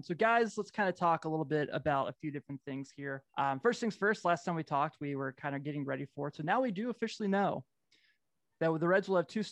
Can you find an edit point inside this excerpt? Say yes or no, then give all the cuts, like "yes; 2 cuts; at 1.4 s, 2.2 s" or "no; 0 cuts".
yes; 1 cut; at 3.3 s